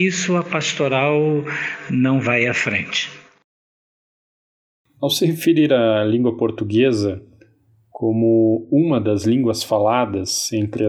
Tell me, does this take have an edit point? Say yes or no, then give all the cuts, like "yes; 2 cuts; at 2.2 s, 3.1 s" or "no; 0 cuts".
no; 0 cuts